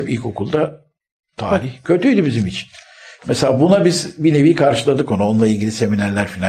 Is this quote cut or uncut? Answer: uncut